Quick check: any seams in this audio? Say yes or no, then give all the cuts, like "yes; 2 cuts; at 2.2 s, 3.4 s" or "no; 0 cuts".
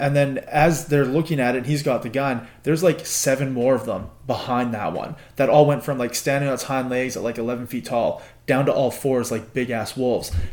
no; 0 cuts